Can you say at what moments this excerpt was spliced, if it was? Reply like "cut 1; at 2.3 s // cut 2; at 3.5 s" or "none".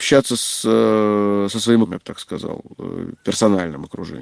cut 1; at 1.8 s